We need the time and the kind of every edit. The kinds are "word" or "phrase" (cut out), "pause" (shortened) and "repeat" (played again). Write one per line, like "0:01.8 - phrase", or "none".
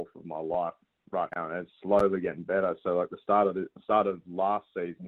0:01.3 - word

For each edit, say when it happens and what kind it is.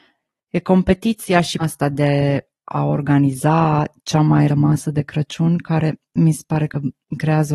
0:01.6 - word
0:04.5 - word

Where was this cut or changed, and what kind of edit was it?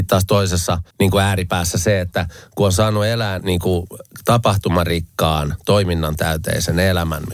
0:00.9 - pause
0:03.4 - word

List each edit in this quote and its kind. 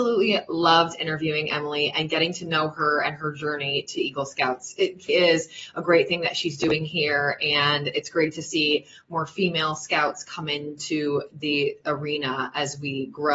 0:05.1 - word

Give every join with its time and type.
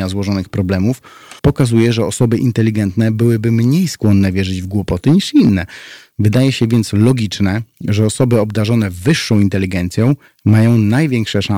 0:01.4 - pause

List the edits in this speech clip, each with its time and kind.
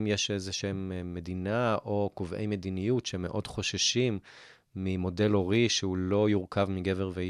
none

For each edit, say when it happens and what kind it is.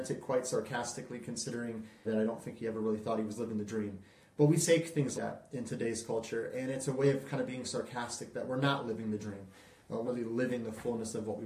0:02.0 - word
0:05.1 - word
0:10.0 - word

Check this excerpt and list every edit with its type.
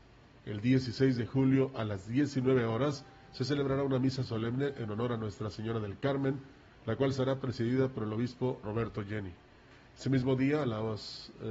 0:08.6 - word

